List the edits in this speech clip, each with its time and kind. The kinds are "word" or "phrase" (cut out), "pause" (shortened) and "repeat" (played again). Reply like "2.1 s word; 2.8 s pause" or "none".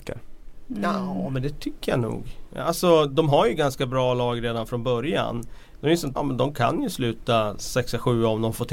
6.2 s phrase